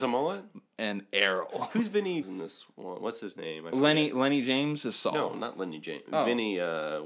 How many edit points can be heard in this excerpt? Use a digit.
1